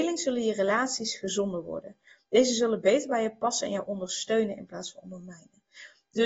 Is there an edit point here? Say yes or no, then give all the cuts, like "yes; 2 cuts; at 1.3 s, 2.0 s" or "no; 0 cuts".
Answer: no; 0 cuts